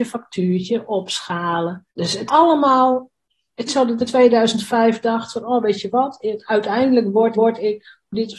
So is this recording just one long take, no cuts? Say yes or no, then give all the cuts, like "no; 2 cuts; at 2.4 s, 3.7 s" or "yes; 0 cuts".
no; 5 cuts; at 1.9 s, 2.3 s, 3.7 s, 4.1 s, 7.3 s